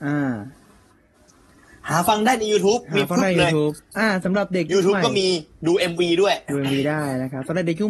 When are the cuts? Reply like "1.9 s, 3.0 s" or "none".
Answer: none